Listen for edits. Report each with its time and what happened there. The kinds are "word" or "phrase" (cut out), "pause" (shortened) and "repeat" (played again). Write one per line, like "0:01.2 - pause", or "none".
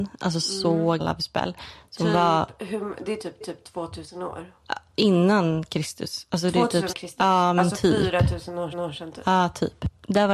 0:01.0 - word
0:03.4 - repeat
0:06.9 - phrase
0:08.7 - repeat